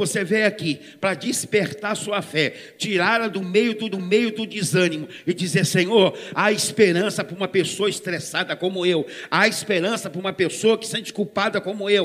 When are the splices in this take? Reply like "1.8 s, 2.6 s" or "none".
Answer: 3.9 s